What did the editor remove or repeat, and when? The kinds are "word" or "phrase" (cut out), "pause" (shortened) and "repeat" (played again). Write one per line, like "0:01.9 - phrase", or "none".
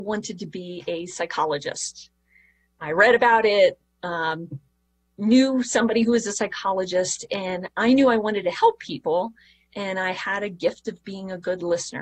none

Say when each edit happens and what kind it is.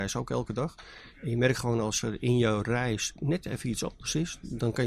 none

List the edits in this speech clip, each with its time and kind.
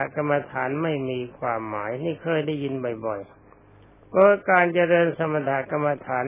0:03.4 - pause

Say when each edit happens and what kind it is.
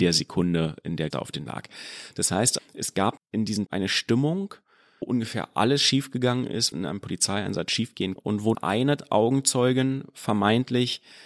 0:01.1 - word
0:01.5 - word
0:02.6 - word
0:03.2 - word
0:03.7 - word
0:05.0 - word
0:06.7 - word
0:08.2 - word
0:08.5 - word

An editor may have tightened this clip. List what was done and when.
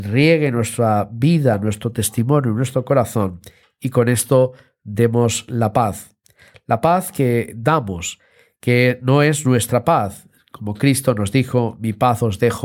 none

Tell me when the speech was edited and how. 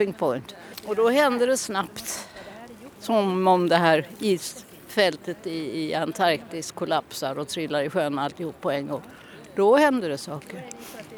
0:03.0 - pause

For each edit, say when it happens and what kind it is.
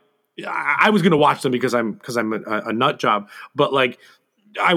none

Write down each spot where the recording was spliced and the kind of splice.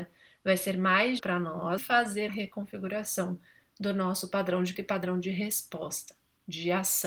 0:01.2 - word
0:01.8 - word
0:02.3 - word
0:04.7 - word

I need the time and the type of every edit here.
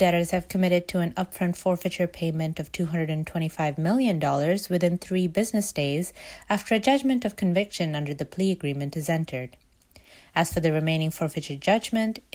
none

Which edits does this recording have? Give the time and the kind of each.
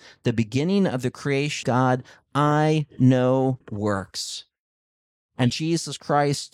0:01.6 - word
0:03.6 - word
0:05.5 - word

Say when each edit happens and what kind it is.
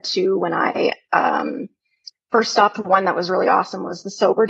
none

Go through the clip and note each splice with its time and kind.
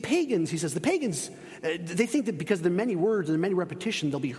none

